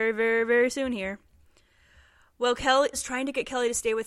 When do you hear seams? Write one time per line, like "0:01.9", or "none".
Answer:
0:02.9